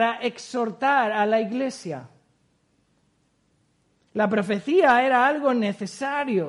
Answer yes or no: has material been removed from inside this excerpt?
no